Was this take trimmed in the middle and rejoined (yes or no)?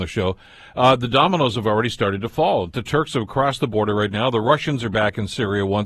no